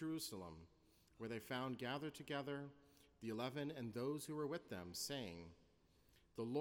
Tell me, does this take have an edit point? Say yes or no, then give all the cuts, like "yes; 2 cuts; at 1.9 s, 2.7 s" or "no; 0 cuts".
no; 0 cuts